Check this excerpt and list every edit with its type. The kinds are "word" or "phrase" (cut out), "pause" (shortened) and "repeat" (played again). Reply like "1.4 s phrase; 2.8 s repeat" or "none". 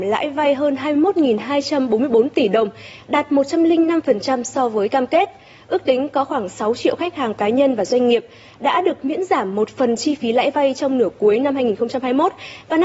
none